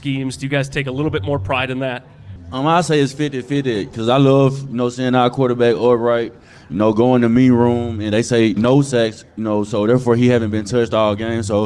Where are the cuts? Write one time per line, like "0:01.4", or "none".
0:08.6